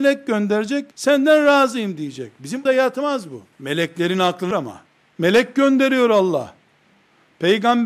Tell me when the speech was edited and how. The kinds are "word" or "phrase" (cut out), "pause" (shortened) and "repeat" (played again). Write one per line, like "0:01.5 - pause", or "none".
0:00.9 - pause
0:02.7 - word
0:03.5 - pause
0:04.5 - word
0:04.9 - pause